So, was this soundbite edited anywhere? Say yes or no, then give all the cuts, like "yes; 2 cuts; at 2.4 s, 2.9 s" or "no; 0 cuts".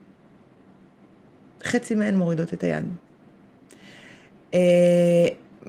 no; 0 cuts